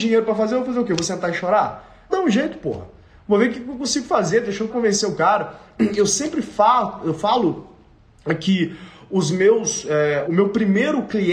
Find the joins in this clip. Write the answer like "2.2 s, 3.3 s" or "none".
2.1 s, 4.7 s, 10.2 s